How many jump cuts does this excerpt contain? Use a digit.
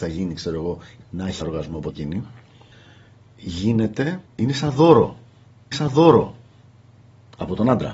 5